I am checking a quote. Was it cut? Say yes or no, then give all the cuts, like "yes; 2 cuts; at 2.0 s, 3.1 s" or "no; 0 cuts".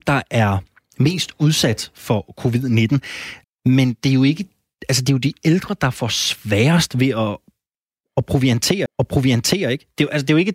yes; 2 cuts; at 3.4 s, 8.9 s